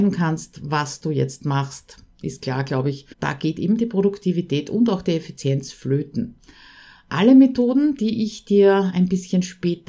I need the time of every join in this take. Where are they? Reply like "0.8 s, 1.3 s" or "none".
3.1 s